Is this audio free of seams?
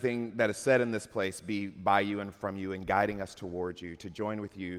yes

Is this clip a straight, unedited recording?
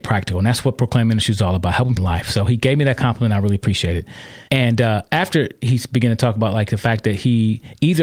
no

